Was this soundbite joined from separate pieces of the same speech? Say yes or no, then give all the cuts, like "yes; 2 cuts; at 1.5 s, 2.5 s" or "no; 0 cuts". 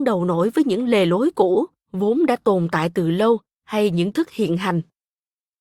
yes; 1 cut; at 4.1 s